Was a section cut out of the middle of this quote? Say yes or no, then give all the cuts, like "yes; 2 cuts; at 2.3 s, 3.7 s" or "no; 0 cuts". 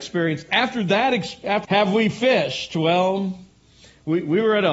yes; 1 cut; at 1.6 s